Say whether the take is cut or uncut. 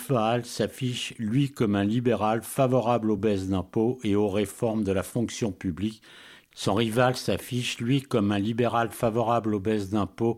uncut